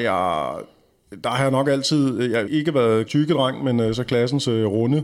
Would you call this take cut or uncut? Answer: cut